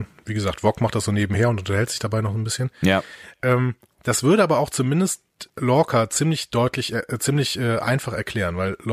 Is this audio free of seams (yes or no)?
no